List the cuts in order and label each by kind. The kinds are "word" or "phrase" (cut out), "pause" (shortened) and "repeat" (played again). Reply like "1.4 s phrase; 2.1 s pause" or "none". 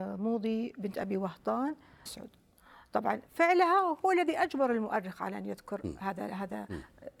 2.1 s phrase; 3.3 s pause